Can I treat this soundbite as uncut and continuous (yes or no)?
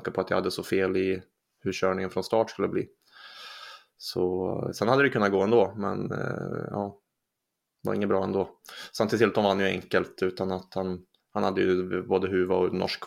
yes